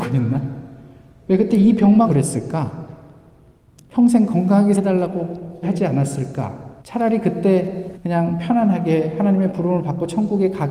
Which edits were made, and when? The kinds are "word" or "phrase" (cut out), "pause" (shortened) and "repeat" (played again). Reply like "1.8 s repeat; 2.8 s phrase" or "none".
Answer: 2.0 s word; 4.7 s word; 5.6 s word; 6.8 s pause; 7.9 s word